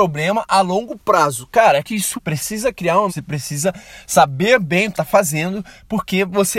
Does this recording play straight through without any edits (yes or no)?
no